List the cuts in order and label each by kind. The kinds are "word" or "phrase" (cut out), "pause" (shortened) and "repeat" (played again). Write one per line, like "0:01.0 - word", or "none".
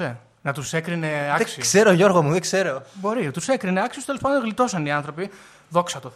none